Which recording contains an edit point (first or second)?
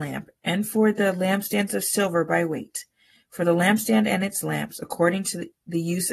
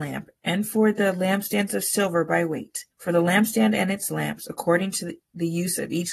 second